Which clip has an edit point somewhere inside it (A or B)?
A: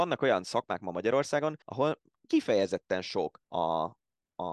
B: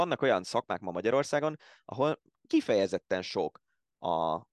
A